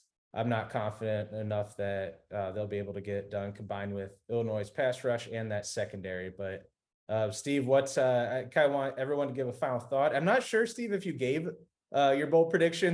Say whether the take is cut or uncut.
uncut